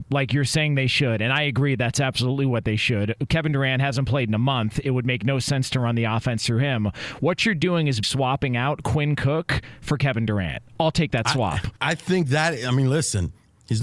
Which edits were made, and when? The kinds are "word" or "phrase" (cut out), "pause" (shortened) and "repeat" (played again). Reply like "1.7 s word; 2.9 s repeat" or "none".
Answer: 8.0 s word; 11.8 s pause